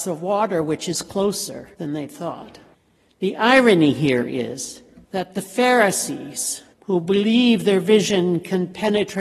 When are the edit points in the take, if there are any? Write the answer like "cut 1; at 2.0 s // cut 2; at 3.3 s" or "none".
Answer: cut 1; at 1.7 s // cut 2; at 2.7 s // cut 3; at 5.0 s // cut 4; at 6.7 s